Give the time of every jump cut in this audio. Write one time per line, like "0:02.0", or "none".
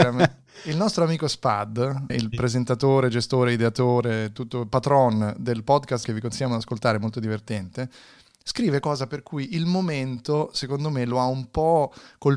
0:02.1
0:06.0
0:08.8